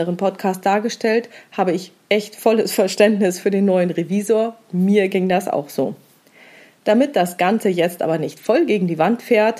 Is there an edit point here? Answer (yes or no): no